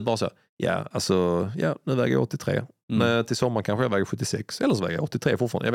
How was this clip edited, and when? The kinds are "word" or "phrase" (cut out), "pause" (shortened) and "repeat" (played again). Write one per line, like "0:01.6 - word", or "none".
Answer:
none